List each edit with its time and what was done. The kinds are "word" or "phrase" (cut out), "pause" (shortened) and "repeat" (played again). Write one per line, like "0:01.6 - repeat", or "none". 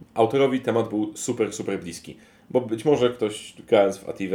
none